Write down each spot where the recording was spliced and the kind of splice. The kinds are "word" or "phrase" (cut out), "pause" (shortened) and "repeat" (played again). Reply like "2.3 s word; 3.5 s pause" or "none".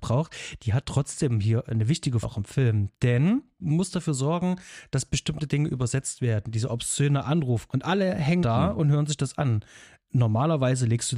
1.7 s word; 2.2 s word; 3.6 s word; 7.7 s word; 8.4 s word